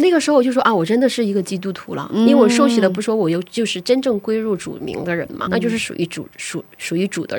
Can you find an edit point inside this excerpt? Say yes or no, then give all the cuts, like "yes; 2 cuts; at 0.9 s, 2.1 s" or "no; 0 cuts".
yes; 1 cut; at 5.5 s